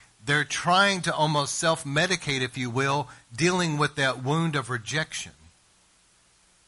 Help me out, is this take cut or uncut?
uncut